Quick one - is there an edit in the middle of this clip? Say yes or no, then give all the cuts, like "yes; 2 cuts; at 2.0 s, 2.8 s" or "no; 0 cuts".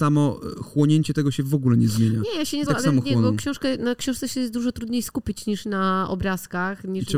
yes; 1 cut; at 2.7 s